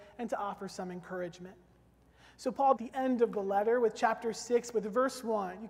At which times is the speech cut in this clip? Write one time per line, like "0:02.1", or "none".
0:02.8

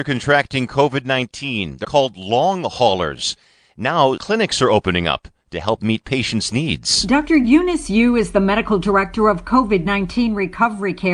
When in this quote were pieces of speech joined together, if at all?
0:01.8
0:04.2

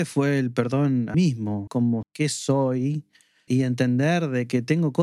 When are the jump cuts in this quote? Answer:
0:01.1
0:01.7
0:02.0
0:03.5

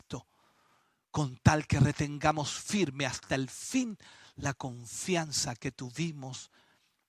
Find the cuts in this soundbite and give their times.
none

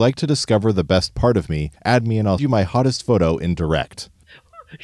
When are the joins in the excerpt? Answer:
0:01.8
0:02.4

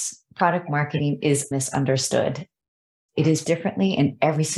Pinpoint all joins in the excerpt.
0:01.5
0:03.1
0:03.4

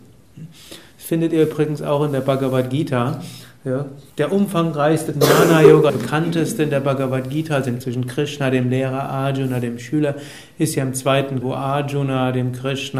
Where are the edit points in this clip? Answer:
0:04.1
0:05.1
0:05.9
0:07.8
0:11.4

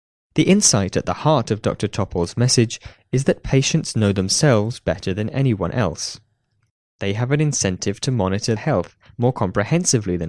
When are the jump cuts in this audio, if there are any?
0:08.6

